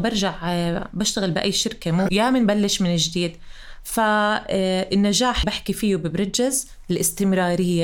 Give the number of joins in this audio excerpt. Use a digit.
2